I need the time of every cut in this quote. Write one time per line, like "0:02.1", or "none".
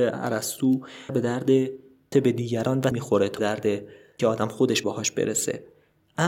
0:01.1
0:02.1
0:02.9
0:03.4
0:04.2
0:04.8